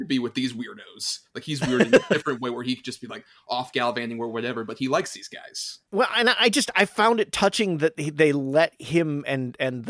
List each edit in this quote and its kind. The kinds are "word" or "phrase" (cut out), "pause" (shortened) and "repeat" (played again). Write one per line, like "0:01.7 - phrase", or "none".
0:05.9 - pause